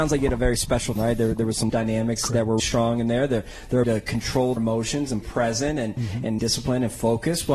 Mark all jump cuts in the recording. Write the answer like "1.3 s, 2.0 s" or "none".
1.0 s, 1.7 s, 2.6 s, 3.8 s, 4.6 s, 5.2 s, 6.4 s